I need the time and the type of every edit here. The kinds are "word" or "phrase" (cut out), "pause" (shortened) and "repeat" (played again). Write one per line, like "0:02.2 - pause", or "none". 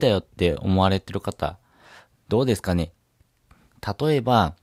none